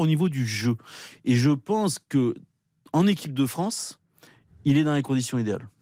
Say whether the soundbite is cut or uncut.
uncut